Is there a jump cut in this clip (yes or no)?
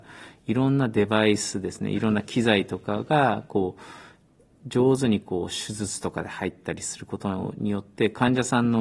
no